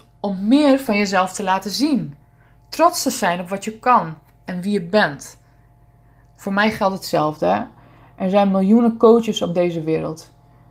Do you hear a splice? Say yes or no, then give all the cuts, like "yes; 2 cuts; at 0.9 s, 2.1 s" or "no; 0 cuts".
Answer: no; 0 cuts